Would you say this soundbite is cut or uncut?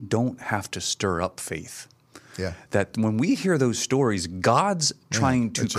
uncut